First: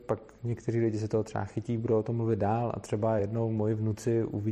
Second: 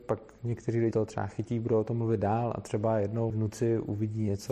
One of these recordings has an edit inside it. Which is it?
second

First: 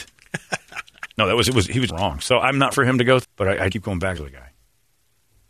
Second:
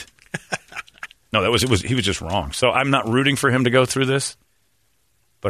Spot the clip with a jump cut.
first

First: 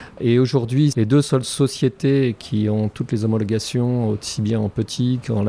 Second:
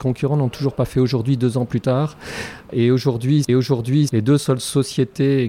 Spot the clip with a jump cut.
second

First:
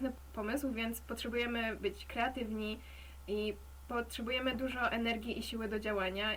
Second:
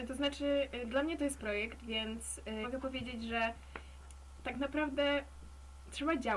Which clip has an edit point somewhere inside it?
second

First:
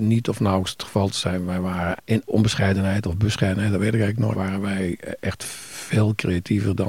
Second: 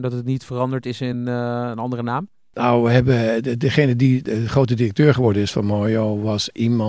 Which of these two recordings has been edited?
first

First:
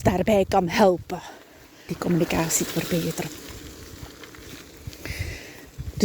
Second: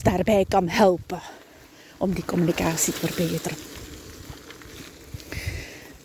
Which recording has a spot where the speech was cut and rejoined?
first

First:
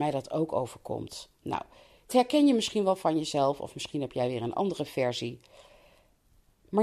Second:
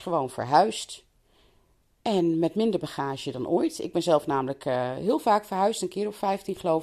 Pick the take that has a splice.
first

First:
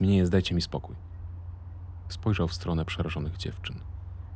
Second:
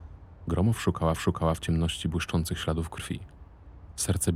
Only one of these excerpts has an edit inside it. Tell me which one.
second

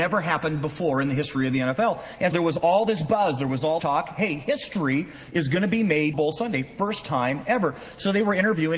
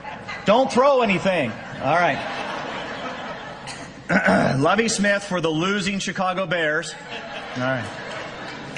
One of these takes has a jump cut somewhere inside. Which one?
first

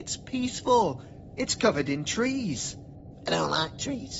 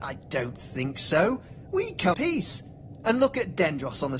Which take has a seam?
second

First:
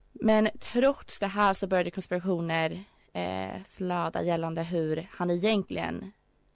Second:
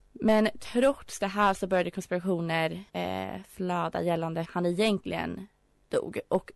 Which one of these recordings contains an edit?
second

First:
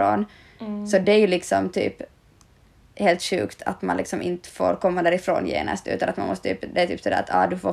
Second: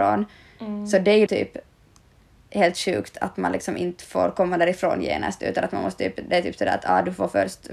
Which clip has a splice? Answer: second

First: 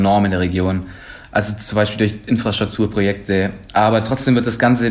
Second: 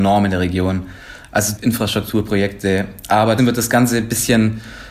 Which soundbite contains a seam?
second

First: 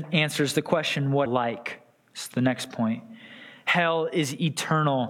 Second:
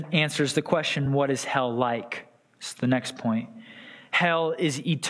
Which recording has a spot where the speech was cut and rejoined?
first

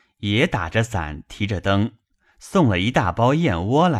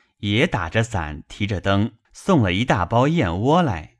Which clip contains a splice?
second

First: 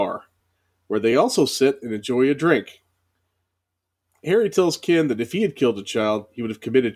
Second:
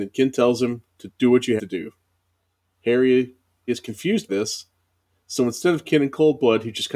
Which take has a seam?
second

